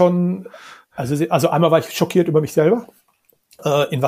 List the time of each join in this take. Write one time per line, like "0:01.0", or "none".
none